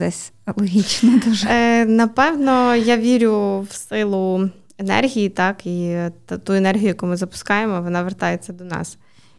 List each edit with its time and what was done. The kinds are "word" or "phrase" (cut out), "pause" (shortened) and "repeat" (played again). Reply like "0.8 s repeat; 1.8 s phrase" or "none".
none